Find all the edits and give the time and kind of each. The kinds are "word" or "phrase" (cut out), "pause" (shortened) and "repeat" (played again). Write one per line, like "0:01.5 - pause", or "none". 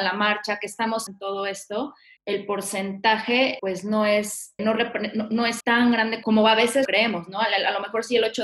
0:01.1 - word
0:02.2 - word
0:03.6 - word
0:04.6 - word
0:05.6 - word
0:06.2 - word
0:06.9 - word